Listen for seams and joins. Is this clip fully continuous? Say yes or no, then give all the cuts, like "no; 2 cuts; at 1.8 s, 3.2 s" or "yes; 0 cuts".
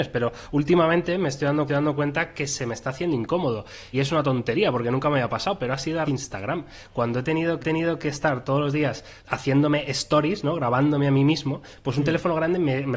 no; 5 cuts; at 1.7 s, 3.9 s, 6.0 s, 7.6 s, 9.2 s